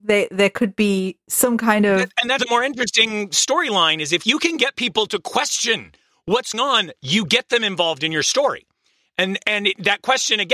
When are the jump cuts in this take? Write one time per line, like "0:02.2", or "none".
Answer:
0:02.4
0:06.5